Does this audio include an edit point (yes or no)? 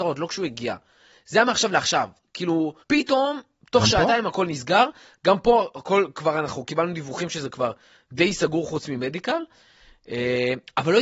yes